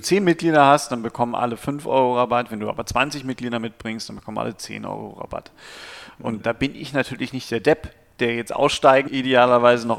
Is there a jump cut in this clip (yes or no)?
yes